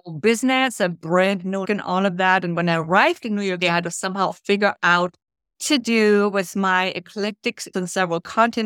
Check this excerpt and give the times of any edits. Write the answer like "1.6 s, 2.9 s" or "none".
1.6 s, 3.6 s, 4.3 s, 5.5 s, 7.7 s